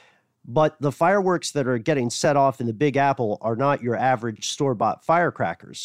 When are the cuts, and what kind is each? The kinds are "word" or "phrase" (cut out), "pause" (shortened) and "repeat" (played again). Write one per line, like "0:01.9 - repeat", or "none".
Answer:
none